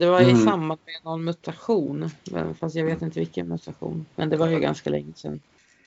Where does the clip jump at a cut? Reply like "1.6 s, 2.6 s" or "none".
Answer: none

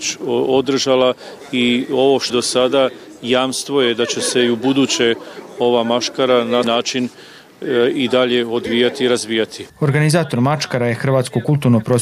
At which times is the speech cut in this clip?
2.3 s, 6.6 s, 9.7 s

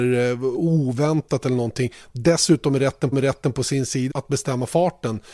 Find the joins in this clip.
3.1 s, 4.1 s

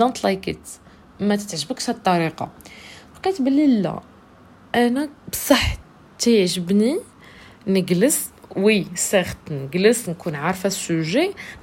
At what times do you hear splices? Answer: none

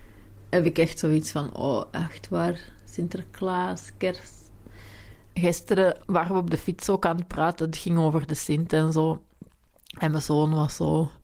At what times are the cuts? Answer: none

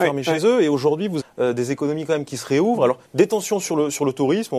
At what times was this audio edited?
1.2 s, 3.1 s

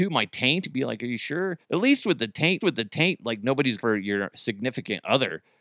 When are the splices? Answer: 1.6 s, 2.6 s, 3.8 s

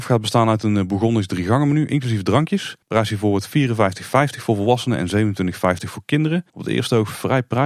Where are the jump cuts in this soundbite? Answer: 2.8 s, 6.5 s

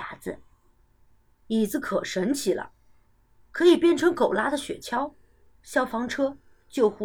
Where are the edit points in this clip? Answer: none

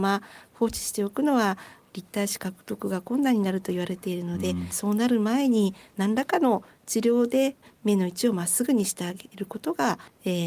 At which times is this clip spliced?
none

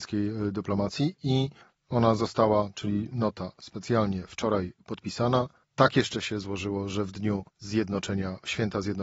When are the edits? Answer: 1.6 s, 5.6 s, 7.5 s

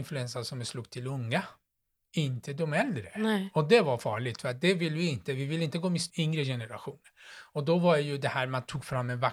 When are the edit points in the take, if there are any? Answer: 6.1 s

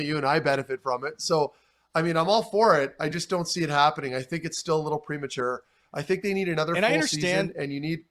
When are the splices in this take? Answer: none

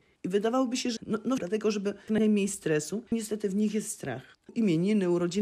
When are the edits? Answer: 1.0 s, 1.4 s, 2.1 s, 3.1 s

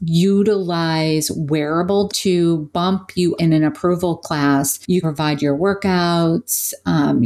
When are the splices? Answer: 2.1 s, 3.4 s, 5.0 s

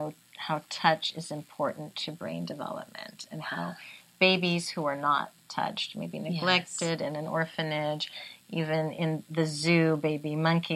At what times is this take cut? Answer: none

